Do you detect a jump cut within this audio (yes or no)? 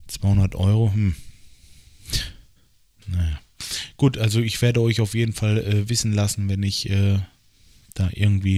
no